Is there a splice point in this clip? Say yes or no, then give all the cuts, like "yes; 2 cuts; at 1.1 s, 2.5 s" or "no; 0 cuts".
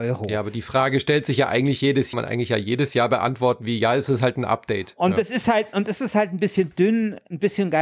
yes; 1 cut; at 2.1 s